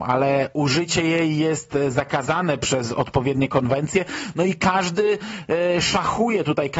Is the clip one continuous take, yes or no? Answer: yes